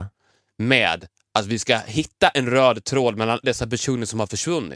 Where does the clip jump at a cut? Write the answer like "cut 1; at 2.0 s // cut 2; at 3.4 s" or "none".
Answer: cut 1; at 3.4 s